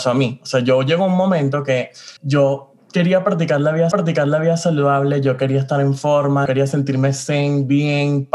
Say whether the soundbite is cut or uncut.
cut